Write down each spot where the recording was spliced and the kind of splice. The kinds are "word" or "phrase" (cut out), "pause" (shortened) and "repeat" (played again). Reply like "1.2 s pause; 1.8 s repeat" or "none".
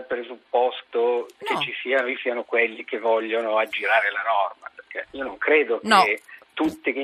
2.2 s phrase